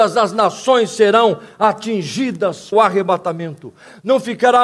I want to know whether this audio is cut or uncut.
cut